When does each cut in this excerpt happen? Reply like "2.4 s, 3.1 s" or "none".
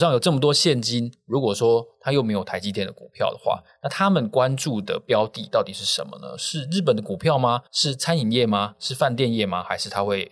7.7 s